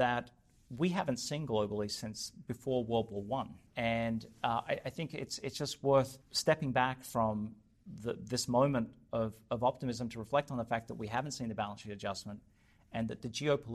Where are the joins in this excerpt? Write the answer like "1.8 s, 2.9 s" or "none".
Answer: 3.7 s, 6.2 s